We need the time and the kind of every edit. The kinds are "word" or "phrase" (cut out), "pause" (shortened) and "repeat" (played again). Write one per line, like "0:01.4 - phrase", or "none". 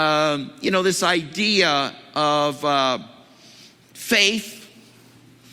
none